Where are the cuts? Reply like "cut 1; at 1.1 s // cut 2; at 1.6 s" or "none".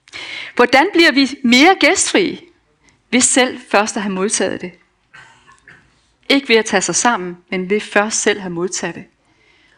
none